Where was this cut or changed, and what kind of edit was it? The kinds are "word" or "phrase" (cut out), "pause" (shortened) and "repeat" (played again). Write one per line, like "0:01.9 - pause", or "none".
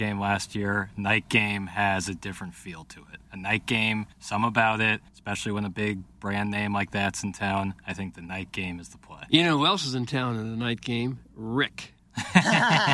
0:03.2 - pause
0:04.1 - pause
0:05.1 - pause